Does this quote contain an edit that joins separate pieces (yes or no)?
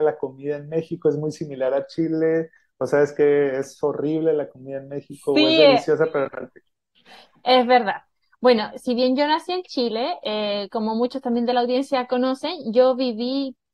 no